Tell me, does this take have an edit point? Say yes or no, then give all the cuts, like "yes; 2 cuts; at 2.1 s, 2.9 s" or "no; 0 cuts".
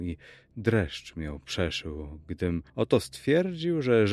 yes; 1 cut; at 2.7 s